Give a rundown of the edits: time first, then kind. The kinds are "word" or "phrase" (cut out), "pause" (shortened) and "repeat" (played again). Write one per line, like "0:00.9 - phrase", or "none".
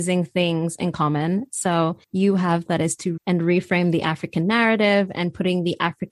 0:02.0 - pause
0:02.7 - phrase
0:03.2 - word